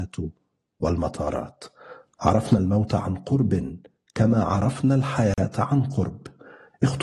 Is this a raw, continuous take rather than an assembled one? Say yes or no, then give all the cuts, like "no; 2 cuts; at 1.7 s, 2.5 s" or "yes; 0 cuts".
yes; 0 cuts